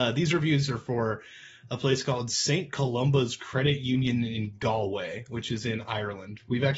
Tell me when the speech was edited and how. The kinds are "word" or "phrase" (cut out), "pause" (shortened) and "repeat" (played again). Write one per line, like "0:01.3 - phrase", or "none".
none